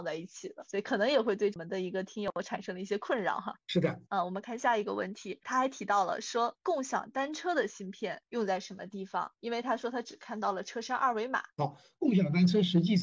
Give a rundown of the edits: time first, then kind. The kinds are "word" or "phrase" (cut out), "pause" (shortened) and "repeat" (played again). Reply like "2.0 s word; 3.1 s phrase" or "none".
4.1 s pause